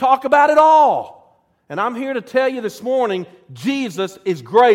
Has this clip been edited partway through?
no; 0 cuts

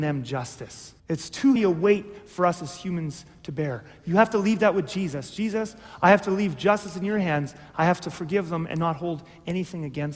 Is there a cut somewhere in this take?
yes; 2 cuts; at 1.0 s, 1.6 s

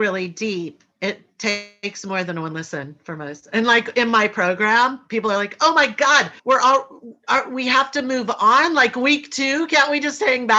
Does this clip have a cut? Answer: yes; 1 cut; at 6.4 s

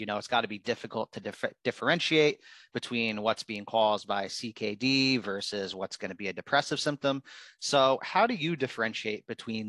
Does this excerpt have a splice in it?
no; 0 cuts

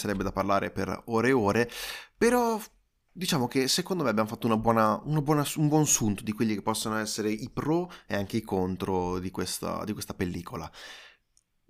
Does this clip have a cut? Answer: no; 0 cuts

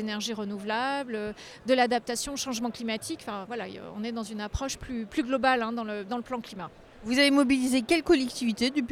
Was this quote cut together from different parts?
no; 0 cuts

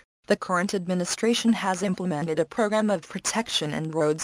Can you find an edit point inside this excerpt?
no; 0 cuts

